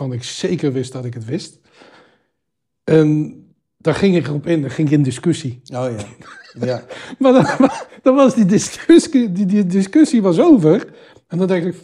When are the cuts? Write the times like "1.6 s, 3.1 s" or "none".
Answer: none